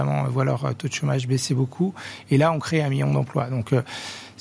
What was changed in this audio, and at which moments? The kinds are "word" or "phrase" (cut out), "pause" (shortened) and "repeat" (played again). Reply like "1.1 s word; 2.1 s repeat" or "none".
none